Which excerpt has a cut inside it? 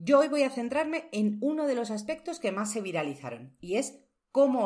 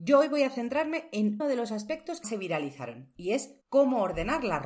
second; 3 cuts; at 1.4 s, 2.2 s, 3.6 s

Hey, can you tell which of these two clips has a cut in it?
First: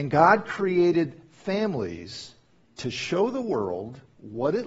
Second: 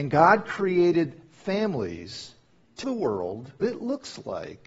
second; 2 cuts; at 2.8 s, 3.6 s

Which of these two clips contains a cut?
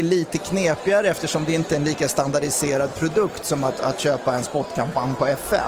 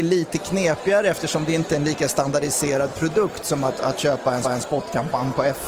second; 1 cut; at 4.4 s

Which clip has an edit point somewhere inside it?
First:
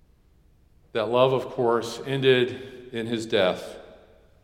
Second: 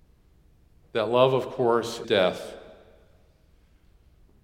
second; 1 cut; at 2.0 s

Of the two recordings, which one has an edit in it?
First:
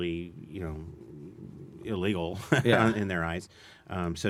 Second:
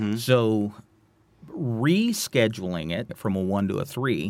second; 1 cut; at 3.1 s

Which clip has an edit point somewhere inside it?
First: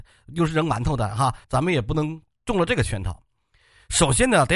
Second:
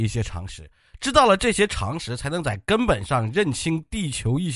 first; 1 cut; at 1.4 s

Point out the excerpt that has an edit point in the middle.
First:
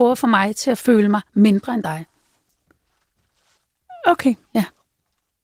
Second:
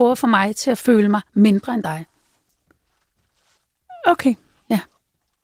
first; 1 cut; at 4.4 s

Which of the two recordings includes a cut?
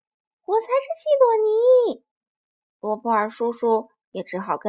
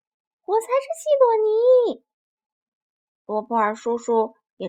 first; 1 cut; at 2.1 s

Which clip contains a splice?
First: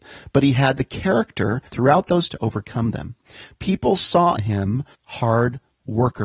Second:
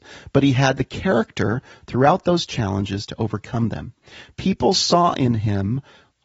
first; 4 cuts; at 1.7 s, 2.3 s, 4.4 s, 4.9 s

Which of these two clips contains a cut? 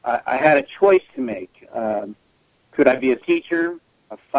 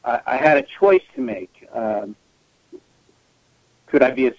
first; 2 cuts; at 2.6 s, 3.2 s

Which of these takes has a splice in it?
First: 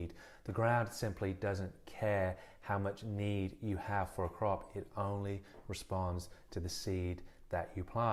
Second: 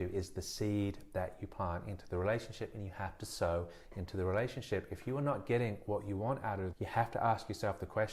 second; 1 cut; at 6.7 s

